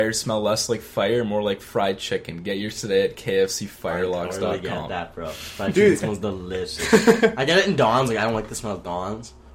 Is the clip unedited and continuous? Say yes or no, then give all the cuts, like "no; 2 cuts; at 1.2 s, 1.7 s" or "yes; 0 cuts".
yes; 0 cuts